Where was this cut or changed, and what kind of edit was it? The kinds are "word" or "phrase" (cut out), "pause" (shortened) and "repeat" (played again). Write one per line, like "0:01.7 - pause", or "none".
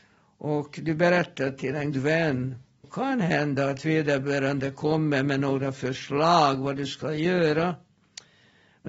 0:01.9 - word
0:02.8 - word